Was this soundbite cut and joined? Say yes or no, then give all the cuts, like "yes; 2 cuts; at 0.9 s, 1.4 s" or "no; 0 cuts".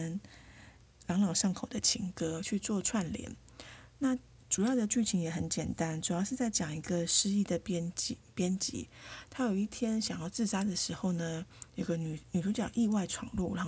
no; 0 cuts